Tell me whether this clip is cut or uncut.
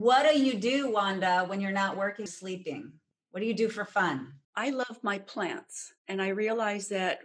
cut